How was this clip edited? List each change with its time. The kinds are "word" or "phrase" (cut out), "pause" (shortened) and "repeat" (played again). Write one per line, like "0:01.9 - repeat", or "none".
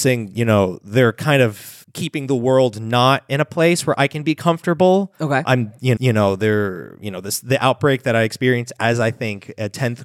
0:01.8 - pause
0:06.0 - repeat